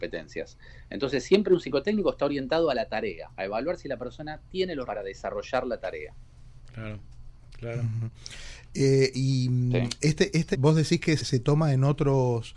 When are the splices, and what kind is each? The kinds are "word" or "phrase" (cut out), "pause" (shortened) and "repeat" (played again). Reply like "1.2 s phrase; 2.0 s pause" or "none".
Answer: 4.9 s word; 10.5 s word; 11.2 s word